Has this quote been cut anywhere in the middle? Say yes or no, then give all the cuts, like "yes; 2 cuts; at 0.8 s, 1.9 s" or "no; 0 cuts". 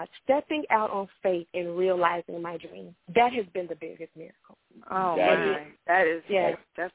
yes; 3 cuts; at 3.0 s, 4.7 s, 5.8 s